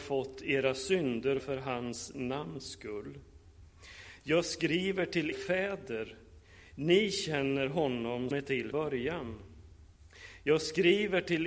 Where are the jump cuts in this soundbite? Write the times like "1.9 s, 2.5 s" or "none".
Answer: 1.4 s, 5.3 s, 8.3 s, 8.7 s

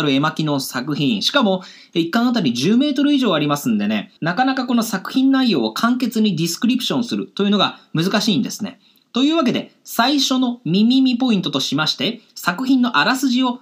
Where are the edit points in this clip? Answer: 4.2 s

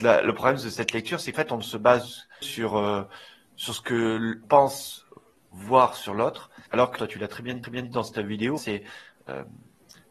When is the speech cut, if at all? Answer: 1.3 s, 2.4 s, 4.4 s, 6.7 s, 7.0 s, 7.6 s, 8.6 s

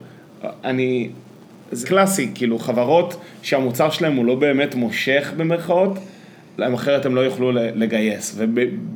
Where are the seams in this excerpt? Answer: 1.8 s

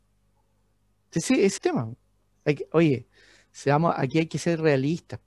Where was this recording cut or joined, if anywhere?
1.6 s

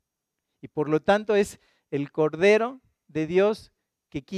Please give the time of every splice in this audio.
none

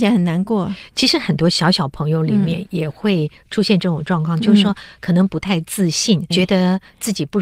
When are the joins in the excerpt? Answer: 6.3 s

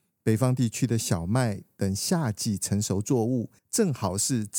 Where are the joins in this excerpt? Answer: 3.6 s

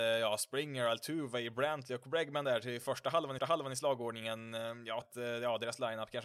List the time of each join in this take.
3.4 s, 5.0 s

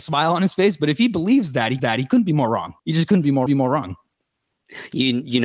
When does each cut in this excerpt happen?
1.8 s, 2.8 s, 3.5 s

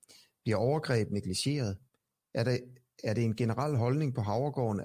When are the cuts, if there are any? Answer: none

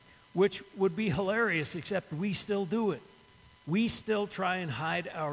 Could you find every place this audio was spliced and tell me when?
3.6 s

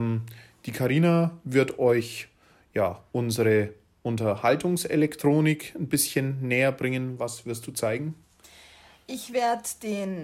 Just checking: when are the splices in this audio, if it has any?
none

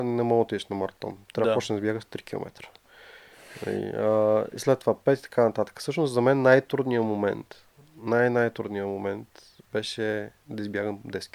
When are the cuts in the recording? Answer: none

